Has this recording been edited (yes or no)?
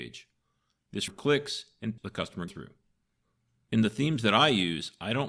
yes